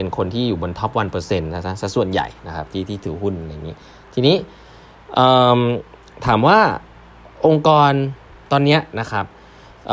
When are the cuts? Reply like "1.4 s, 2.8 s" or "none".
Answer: none

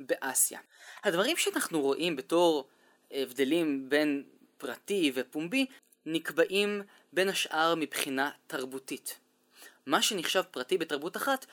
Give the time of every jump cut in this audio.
none

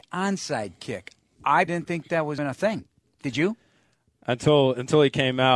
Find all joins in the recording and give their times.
1.7 s, 2.4 s

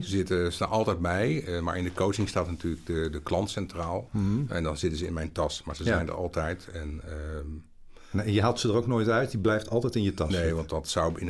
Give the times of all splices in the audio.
none

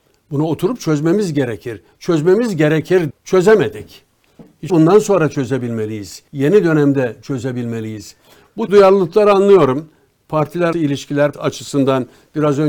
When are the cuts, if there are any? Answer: 3.1 s, 4.7 s, 6.3 s, 8.7 s, 10.7 s, 11.3 s

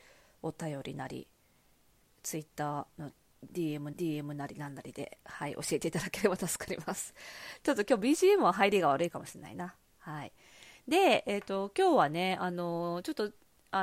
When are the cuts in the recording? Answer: 3.9 s

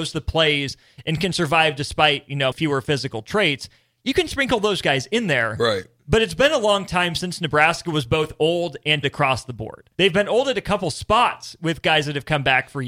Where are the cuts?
2.5 s, 9.0 s, 9.9 s

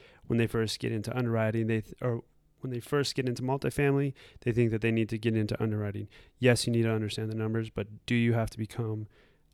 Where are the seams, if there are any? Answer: none

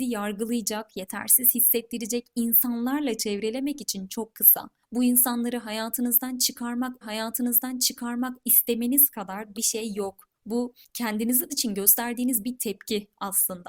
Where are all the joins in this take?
7.0 s, 9.5 s, 11.5 s

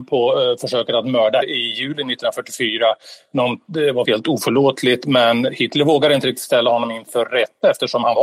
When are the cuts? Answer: 1.4 s, 4.0 s

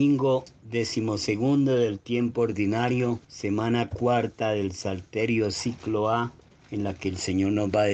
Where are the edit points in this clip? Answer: 3.2 s, 6.5 s

